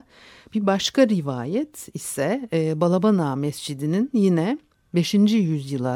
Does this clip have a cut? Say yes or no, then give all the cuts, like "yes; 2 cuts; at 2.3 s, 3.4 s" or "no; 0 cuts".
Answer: no; 0 cuts